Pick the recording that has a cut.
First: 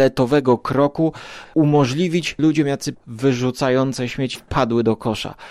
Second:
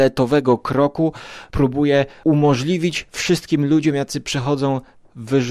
first; 4 cuts; at 1.5 s, 2.4 s, 2.9 s, 4.4 s

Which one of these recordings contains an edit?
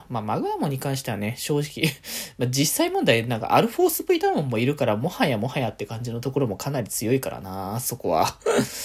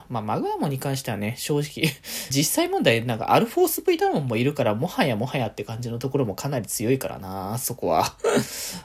second; 1 cut; at 2.3 s

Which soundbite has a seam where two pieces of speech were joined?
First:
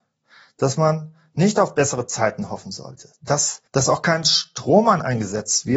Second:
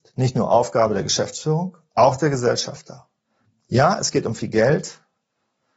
first; 1 cut; at 3.7 s

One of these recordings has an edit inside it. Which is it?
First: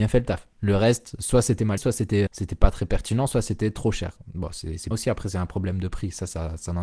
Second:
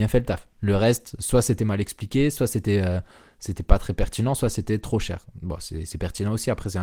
first; 3 cuts; at 1.8 s, 2.3 s, 4.9 s

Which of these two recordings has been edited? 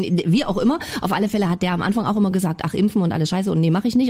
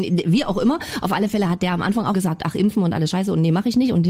second; 1 cut; at 2.1 s

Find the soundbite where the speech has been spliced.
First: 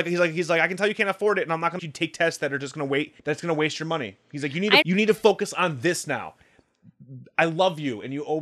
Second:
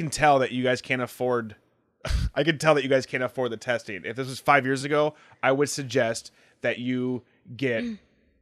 first; 3 cuts; at 1.8 s, 3.2 s, 4.8 s

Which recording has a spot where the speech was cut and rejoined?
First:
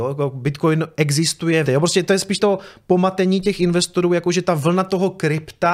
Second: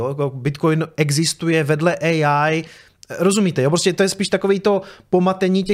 first; 2 cuts; at 1.7 s, 2.4 s

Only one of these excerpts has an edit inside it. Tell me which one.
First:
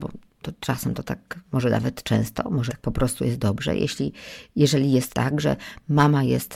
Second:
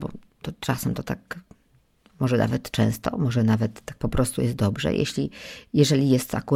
first; 3 cuts; at 1.4 s, 2.7 s, 5.1 s

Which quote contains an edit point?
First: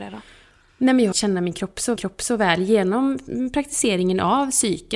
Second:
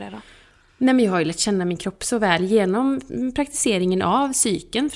first; 2 cuts; at 1.1 s, 2.0 s

